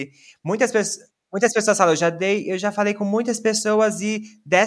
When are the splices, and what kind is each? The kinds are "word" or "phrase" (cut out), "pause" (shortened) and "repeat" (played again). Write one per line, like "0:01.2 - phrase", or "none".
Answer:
0:01.2 - pause